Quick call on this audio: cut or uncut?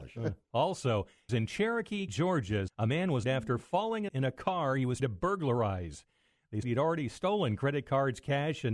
cut